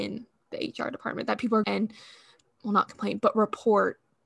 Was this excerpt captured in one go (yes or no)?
no